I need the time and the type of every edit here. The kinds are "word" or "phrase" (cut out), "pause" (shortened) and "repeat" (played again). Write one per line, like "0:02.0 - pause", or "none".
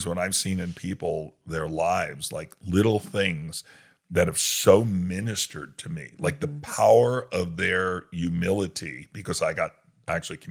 none